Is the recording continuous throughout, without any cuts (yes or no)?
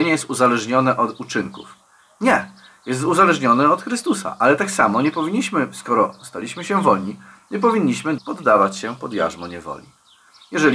no